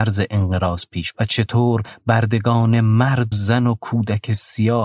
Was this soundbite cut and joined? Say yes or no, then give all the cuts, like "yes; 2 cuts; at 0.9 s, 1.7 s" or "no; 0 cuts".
yes; 2 cuts; at 1.1 s, 3.3 s